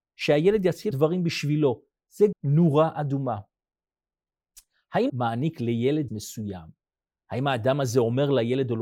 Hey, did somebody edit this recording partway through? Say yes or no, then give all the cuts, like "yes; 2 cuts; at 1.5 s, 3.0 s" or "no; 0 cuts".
yes; 4 cuts; at 0.9 s, 2.3 s, 5.1 s, 6.1 s